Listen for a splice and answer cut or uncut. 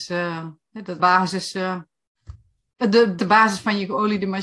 cut